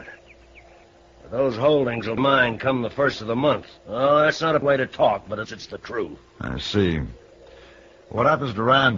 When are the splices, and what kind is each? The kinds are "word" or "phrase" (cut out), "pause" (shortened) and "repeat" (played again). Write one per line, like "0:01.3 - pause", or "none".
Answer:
0:02.2 - word
0:03.8 - pause
0:04.6 - word
0:05.4 - word
0:06.3 - pause